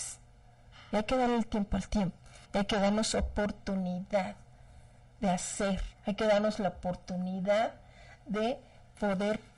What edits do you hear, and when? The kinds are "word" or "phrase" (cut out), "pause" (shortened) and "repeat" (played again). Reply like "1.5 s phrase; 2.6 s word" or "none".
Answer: 2.5 s pause; 6.0 s pause